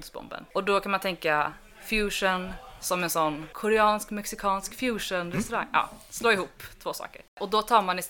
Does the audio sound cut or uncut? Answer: uncut